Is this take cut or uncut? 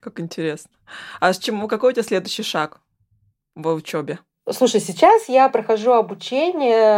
uncut